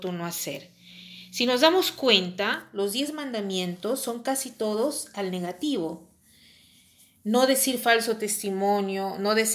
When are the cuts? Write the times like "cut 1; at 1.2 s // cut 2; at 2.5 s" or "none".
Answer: none

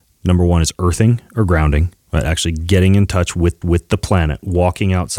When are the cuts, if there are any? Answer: cut 1; at 2.0 s // cut 2; at 3.6 s

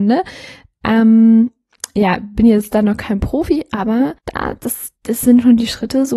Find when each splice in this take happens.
cut 1; at 4.2 s // cut 2; at 5.0 s

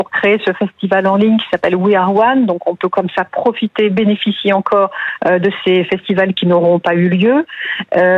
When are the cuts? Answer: none

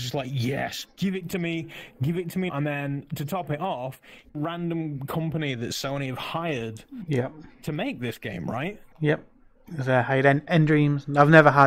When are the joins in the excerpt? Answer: cut 1; at 2.5 s // cut 2; at 4.3 s // cut 3; at 7.5 s // cut 4; at 8.9 s

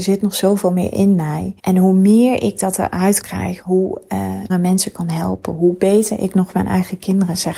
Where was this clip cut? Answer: cut 1; at 1.6 s // cut 2; at 3.2 s // cut 3; at 3.6 s // cut 4; at 4.5 s

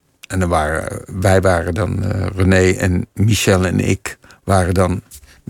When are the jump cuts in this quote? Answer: none

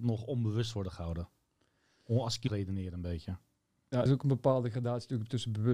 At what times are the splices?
cut 1; at 2.5 s // cut 2; at 4.1 s

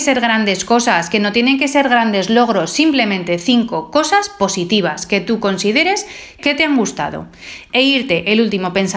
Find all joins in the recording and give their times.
cut 1; at 6.4 s

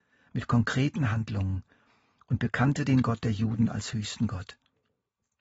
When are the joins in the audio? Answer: none

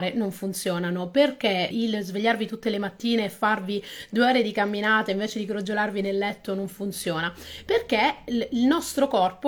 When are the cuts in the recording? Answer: cut 1; at 1.7 s

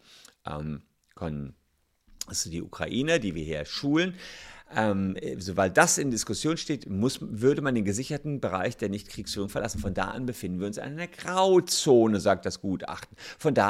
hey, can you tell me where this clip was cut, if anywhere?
none

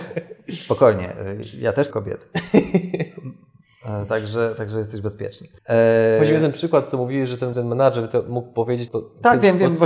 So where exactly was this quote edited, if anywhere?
cut 1; at 1.9 s // cut 2; at 5.6 s // cut 3; at 7.5 s // cut 4; at 8.9 s

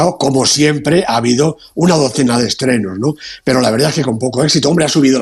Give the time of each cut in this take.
none

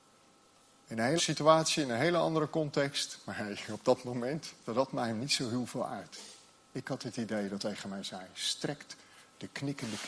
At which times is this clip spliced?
cut 1; at 1.2 s // cut 2; at 4.7 s // cut 3; at 7.6 s

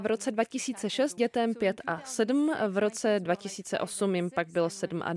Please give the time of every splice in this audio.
cut 1; at 1.2 s

